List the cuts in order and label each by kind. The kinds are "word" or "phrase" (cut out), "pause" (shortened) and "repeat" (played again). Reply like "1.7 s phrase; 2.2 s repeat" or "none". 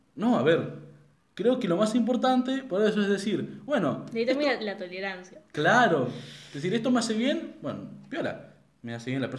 1.2 s pause